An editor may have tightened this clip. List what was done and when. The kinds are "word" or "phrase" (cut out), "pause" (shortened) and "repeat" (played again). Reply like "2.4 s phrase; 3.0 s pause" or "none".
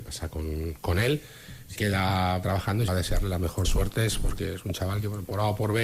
1.8 s word; 2.4 s phrase; 2.9 s phrase; 3.6 s phrase